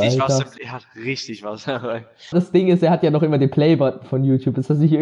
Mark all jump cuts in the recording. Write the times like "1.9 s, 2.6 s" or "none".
2.3 s